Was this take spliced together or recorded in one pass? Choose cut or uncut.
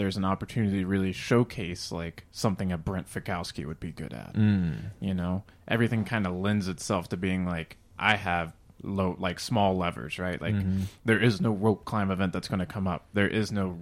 uncut